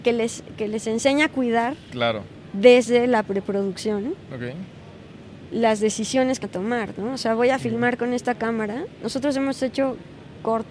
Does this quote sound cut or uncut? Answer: cut